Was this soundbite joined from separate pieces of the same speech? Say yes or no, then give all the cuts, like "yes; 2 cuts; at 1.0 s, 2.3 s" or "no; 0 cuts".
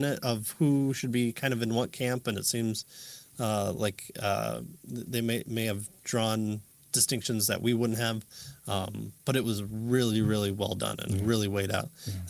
no; 0 cuts